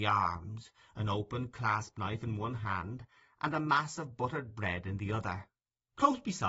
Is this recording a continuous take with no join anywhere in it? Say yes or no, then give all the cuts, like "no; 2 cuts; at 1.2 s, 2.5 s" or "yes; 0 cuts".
yes; 0 cuts